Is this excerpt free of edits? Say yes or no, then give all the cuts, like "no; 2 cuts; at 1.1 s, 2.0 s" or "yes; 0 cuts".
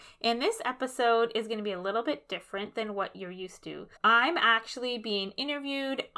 no; 1 cut; at 4.0 s